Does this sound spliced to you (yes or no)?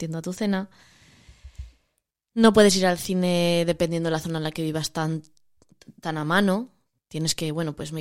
no